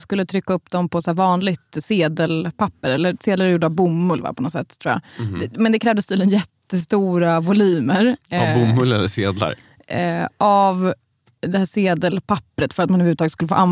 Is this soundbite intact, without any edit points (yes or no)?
yes